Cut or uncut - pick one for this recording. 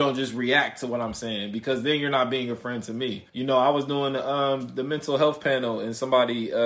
cut